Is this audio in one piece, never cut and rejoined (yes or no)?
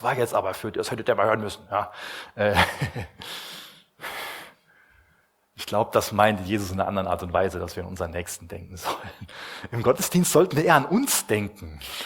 yes